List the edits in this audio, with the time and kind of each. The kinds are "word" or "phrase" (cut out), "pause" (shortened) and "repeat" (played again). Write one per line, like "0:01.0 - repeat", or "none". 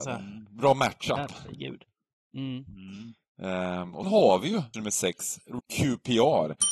0:04.0 - word
0:04.7 - word
0:05.6 - word

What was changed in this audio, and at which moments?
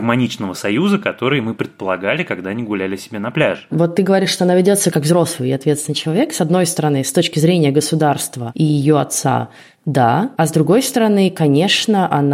none

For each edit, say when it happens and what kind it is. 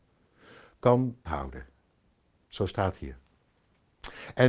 0:01.2 - word

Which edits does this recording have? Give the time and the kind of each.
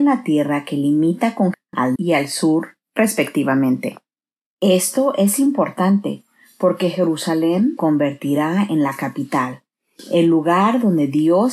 0:01.5 - word
0:01.9 - word
0:07.8 - word

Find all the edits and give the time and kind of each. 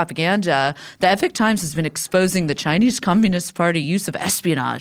none

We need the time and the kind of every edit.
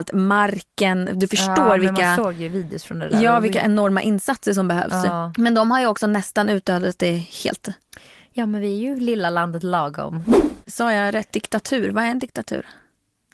none

